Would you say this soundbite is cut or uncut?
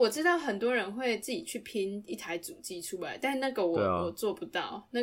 uncut